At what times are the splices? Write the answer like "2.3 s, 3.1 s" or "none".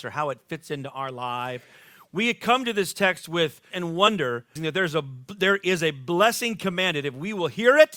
3.7 s, 4.6 s